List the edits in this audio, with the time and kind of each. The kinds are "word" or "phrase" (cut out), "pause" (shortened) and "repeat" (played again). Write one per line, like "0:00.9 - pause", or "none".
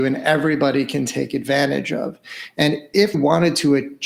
0:03.1 - word